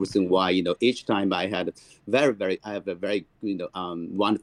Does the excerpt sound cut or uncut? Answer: uncut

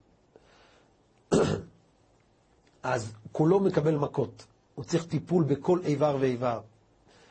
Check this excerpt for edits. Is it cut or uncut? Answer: uncut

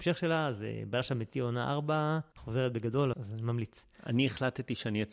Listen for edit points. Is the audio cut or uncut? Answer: cut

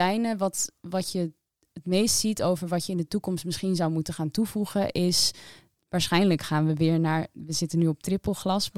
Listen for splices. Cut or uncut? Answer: uncut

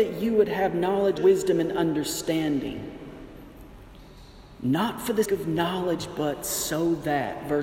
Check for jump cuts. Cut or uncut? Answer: cut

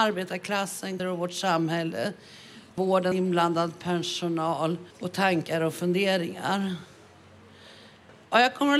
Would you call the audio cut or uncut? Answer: cut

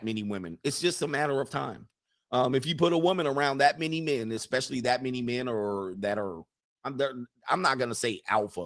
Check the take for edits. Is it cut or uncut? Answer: uncut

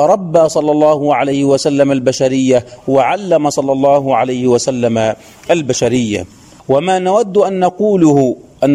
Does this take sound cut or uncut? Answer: uncut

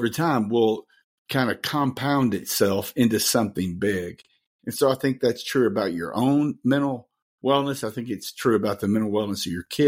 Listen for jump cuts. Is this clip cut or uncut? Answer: uncut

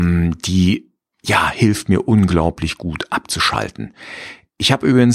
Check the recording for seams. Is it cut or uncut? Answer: uncut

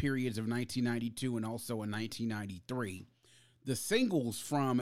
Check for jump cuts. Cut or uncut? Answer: uncut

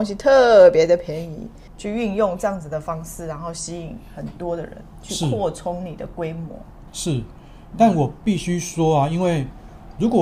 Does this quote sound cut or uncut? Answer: uncut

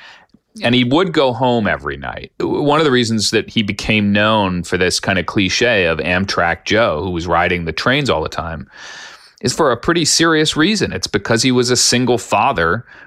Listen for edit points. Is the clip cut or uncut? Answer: cut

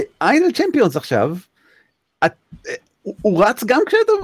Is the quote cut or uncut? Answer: uncut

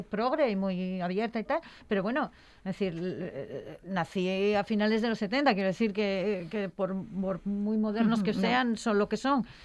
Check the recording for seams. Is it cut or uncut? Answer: uncut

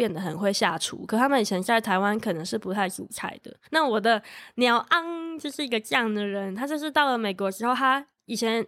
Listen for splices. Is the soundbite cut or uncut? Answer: cut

